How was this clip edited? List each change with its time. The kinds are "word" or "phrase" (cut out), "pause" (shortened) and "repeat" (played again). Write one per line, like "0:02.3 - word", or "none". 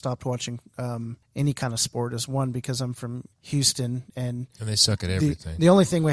0:01.2 - pause
0:03.3 - pause